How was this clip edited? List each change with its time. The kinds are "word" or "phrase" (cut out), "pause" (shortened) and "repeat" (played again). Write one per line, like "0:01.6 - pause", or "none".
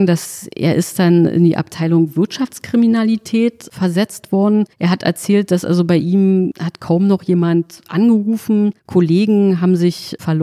0:04.7 - pause
0:08.8 - pause